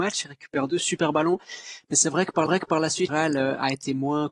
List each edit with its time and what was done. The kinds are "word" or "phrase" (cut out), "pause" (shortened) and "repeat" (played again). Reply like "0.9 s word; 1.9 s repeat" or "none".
2.5 s repeat; 3.1 s word